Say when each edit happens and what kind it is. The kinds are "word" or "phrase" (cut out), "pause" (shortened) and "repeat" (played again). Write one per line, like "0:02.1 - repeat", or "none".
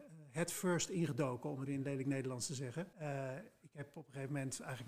0:01.7 - word
0:02.9 - pause